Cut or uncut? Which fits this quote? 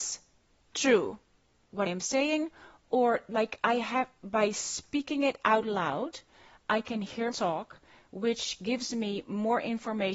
cut